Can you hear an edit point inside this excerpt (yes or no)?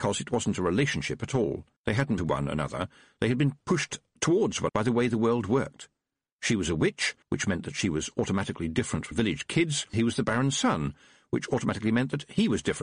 yes